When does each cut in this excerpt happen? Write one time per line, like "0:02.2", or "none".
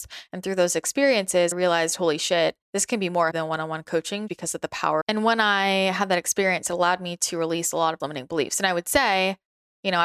0:01.5
0:02.6
0:03.3
0:04.3
0:05.0
0:08.0